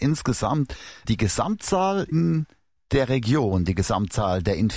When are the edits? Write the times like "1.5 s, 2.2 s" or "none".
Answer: 1.0 s, 2.1 s